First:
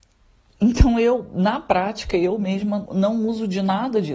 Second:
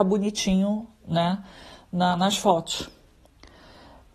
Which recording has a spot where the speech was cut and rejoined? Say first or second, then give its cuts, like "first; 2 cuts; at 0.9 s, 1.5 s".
first; 1 cut; at 2.9 s